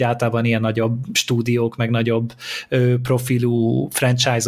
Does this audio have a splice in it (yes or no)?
no